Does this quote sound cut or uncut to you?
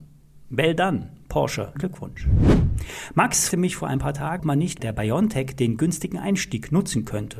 cut